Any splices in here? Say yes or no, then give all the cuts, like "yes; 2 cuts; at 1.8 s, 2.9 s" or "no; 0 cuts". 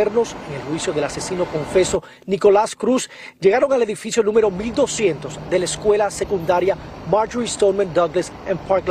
no; 0 cuts